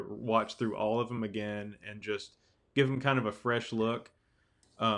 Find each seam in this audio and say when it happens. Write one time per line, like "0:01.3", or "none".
none